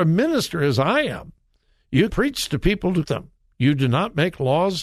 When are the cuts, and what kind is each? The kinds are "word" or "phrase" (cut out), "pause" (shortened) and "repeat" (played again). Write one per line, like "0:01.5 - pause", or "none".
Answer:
0:02.1 - word
0:03.0 - word